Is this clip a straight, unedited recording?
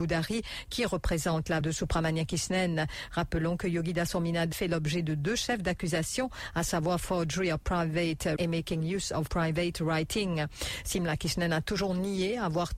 no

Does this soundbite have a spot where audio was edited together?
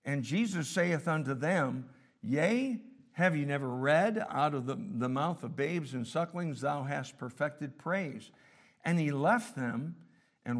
no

